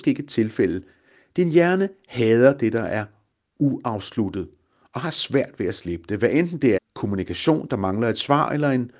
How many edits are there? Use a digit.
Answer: 1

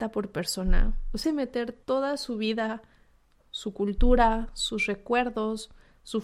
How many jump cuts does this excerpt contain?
2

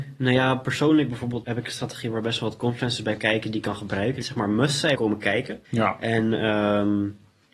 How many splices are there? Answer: 5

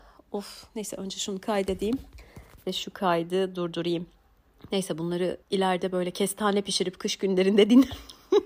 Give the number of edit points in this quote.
1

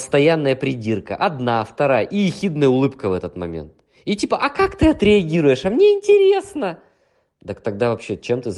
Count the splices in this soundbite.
0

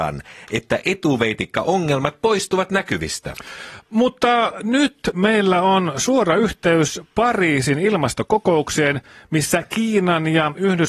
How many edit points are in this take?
0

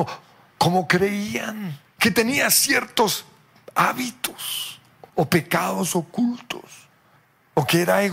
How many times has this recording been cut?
3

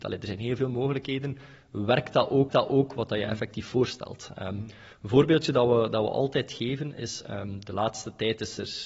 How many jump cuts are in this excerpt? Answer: 1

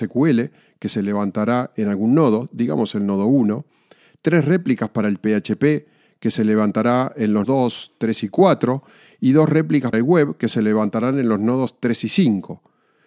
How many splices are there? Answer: 2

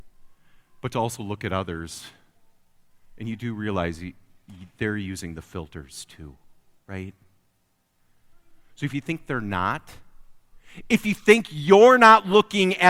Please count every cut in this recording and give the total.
0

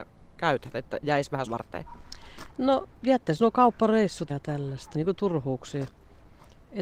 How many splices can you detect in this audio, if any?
5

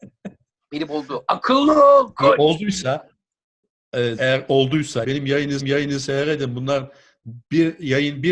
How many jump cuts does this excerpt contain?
3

